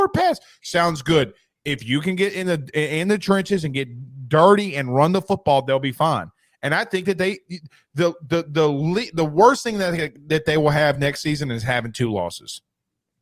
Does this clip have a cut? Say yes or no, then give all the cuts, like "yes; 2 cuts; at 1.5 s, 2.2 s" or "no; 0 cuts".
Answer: no; 0 cuts